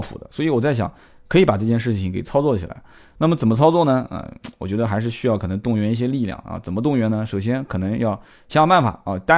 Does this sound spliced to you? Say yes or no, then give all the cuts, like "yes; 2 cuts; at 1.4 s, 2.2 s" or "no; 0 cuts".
no; 0 cuts